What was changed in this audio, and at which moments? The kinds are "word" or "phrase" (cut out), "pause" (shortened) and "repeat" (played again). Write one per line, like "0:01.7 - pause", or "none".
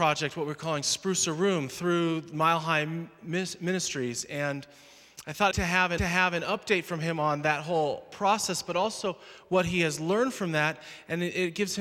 0:05.5 - phrase
0:06.0 - repeat